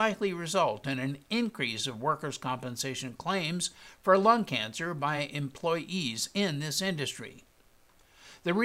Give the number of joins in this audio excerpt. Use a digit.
0